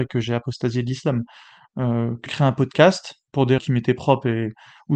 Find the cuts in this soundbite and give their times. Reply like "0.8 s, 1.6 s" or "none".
2.3 s, 3.6 s

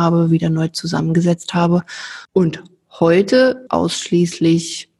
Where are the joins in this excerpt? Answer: 2.2 s, 3.7 s

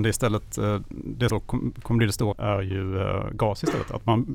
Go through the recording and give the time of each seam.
1.3 s, 2.3 s

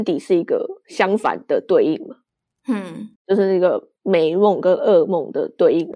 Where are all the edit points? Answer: 3.2 s, 4.0 s

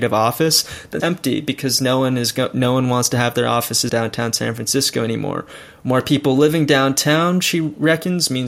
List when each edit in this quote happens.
1.0 s, 3.9 s

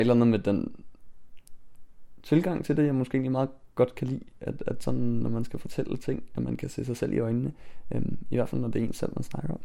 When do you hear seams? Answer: none

